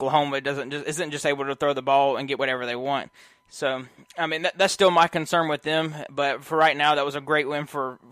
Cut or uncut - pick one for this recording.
uncut